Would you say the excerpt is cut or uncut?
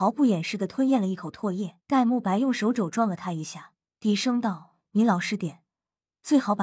cut